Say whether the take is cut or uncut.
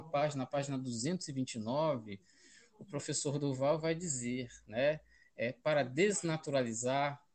uncut